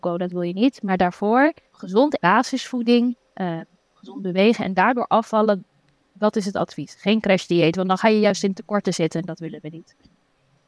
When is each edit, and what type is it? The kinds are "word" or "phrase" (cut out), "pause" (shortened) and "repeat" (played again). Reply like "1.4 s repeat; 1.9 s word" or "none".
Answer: 1.7 s word; 2.2 s phrase